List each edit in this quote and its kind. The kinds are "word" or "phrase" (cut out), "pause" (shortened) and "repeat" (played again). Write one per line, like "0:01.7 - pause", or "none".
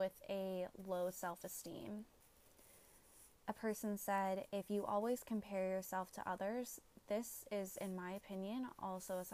0:03.4 - pause